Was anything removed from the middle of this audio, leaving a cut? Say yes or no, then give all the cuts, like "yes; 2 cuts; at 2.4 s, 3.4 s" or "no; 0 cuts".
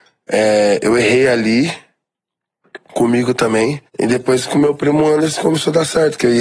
yes; 2 cuts; at 2.8 s, 3.9 s